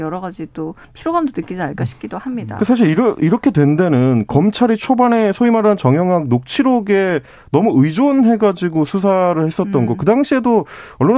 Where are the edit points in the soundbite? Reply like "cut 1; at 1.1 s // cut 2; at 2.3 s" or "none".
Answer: none